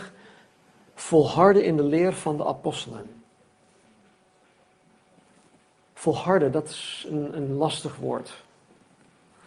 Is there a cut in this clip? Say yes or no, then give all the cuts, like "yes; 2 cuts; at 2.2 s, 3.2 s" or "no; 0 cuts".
no; 0 cuts